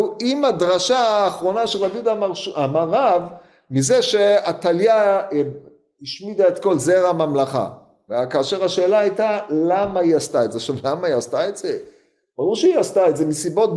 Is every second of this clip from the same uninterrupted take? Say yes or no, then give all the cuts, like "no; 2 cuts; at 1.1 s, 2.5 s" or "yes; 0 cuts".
yes; 0 cuts